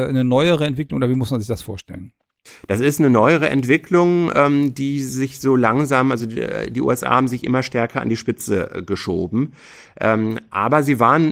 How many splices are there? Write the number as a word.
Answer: zero